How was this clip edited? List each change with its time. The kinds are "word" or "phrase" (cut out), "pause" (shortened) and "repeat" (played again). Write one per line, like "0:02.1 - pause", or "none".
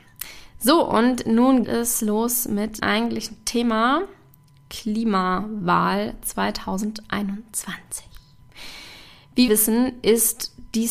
0:01.6 - word
0:02.8 - word
0:09.5 - word